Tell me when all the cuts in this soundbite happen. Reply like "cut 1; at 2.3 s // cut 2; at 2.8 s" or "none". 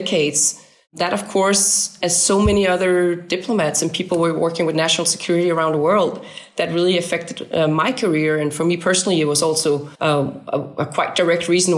cut 1; at 9.9 s